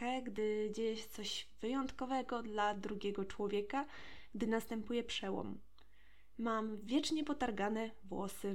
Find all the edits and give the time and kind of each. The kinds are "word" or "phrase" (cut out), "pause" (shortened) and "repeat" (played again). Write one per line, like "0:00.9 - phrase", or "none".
none